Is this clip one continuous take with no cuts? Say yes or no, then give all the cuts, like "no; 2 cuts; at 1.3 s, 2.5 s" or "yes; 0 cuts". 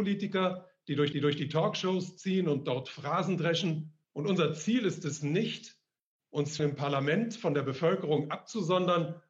no; 3 cuts; at 1.1 s, 4.0 s, 6.6 s